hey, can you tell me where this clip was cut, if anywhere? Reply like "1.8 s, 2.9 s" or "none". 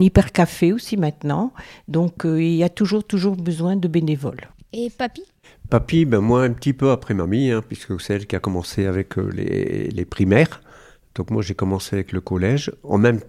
none